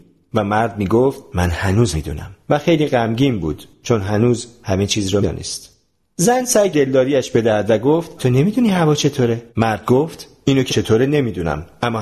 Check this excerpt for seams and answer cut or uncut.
cut